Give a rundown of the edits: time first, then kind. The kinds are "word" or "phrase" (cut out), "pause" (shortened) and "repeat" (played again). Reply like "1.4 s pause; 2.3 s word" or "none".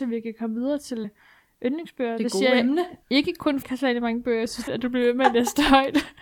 1.0 s word; 3.0 s pause; 3.6 s phrase; 4.7 s phrase